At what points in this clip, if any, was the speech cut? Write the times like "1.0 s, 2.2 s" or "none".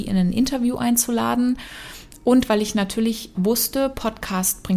3.3 s